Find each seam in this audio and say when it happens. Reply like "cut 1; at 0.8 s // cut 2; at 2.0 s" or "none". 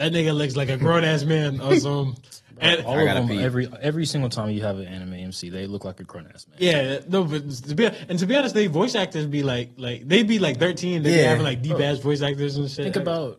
none

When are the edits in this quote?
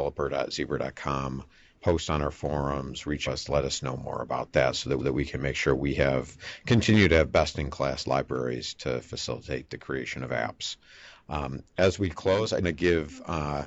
cut 1; at 1.7 s // cut 2; at 3.3 s // cut 3; at 5.0 s // cut 4; at 11.7 s // cut 5; at 12.6 s

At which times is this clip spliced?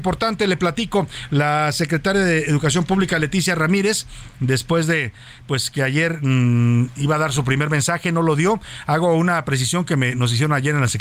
none

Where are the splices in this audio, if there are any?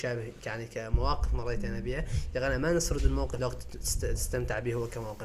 cut 1; at 3.4 s

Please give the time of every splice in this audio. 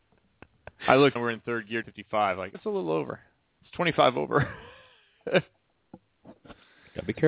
cut 1; at 1.2 s // cut 2; at 1.8 s // cut 3; at 2.5 s

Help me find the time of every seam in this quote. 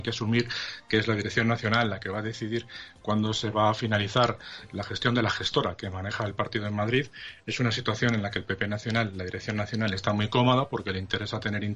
none

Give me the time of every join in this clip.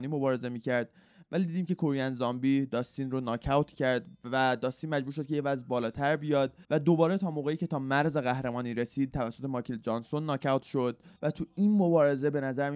cut 1; at 6.6 s // cut 2; at 11.2 s

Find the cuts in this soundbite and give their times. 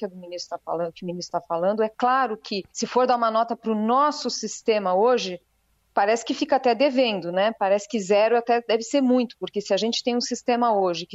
cut 1; at 2.7 s

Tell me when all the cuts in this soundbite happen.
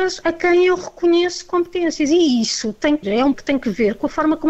cut 1; at 3.0 s // cut 2; at 3.3 s

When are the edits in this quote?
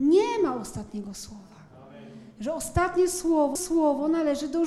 cut 1; at 3.6 s

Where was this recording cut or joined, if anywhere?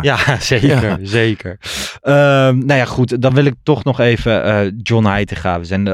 none

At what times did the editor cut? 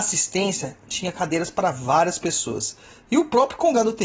none

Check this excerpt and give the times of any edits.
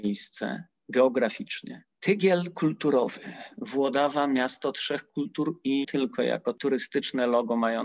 cut 1; at 5.8 s

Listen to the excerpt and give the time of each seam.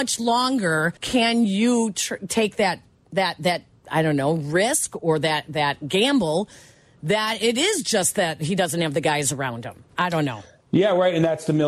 cut 1; at 1.0 s // cut 2; at 9.9 s

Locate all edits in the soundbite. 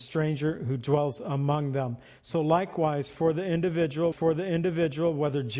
cut 1; at 4.1 s

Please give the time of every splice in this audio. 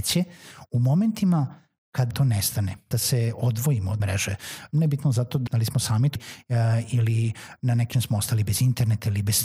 cut 1; at 2.1 s // cut 2; at 2.9 s // cut 3; at 4.0 s // cut 4; at 5.5 s // cut 5; at 6.2 s // cut 6; at 7.9 s

